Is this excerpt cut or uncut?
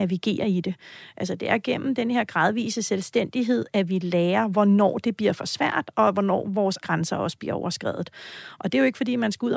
cut